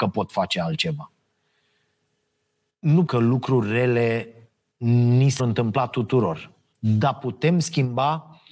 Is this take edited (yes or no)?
yes